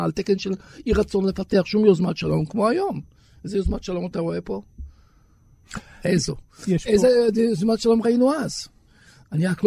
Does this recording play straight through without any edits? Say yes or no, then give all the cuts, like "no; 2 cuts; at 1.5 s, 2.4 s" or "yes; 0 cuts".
yes; 0 cuts